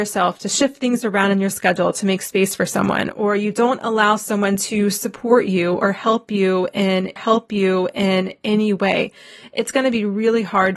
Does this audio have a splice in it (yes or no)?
yes